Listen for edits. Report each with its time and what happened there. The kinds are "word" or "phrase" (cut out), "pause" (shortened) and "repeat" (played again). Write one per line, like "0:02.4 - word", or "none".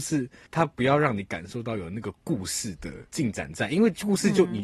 0:03.1 - pause